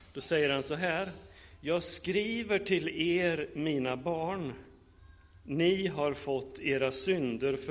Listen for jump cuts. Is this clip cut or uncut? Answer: uncut